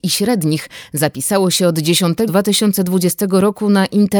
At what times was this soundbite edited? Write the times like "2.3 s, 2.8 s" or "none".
2.3 s